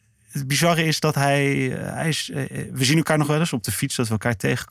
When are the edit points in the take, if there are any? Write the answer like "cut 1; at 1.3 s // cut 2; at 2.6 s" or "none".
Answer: none